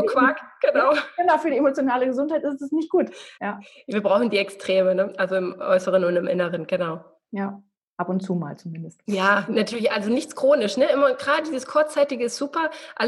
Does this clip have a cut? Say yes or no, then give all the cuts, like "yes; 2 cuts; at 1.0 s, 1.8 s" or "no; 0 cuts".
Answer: yes; 2 cuts; at 3.3 s, 7.9 s